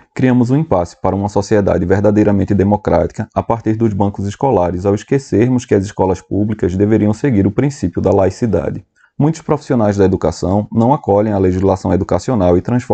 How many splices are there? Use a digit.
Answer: 1